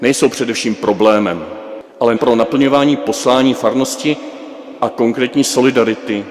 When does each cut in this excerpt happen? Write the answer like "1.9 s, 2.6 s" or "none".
2.2 s